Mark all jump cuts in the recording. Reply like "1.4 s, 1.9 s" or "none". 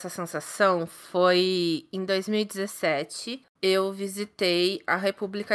3.6 s